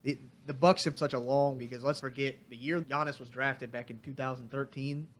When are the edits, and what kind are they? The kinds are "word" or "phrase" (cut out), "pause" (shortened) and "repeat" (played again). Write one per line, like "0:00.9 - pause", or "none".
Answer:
0:01.0 - word
0:01.6 - word
0:02.0 - word
0:02.8 - word